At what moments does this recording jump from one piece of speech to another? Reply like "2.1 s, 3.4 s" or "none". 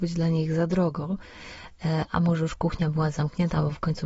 none